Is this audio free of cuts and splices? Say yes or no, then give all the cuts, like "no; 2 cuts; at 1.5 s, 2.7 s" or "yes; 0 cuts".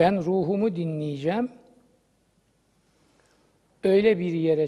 yes; 0 cuts